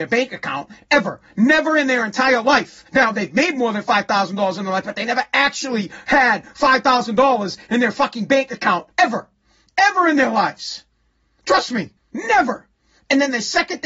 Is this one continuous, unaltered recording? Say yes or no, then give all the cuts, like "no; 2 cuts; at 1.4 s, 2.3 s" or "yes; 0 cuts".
no; 3 cuts; at 2.9 s, 8.9 s, 12.0 s